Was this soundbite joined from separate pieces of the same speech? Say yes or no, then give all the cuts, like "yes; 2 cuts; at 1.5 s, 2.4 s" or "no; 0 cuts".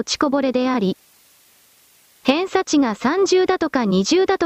no; 0 cuts